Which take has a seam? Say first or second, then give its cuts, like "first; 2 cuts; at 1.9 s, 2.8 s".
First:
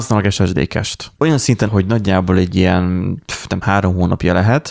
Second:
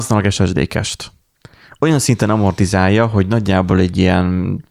first; 3 cuts; at 1.2 s, 1.7 s, 3.6 s